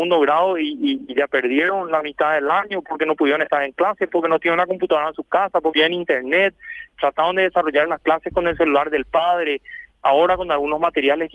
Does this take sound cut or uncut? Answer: cut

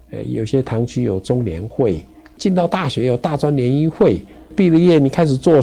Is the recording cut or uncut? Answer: uncut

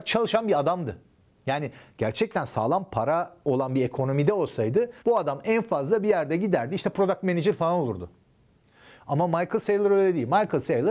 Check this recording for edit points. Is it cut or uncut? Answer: cut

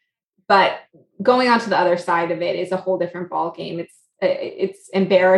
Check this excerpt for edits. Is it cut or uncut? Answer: uncut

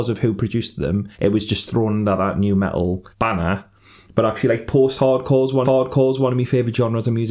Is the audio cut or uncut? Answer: cut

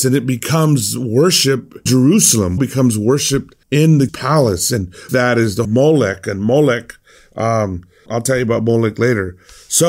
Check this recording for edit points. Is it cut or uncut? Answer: cut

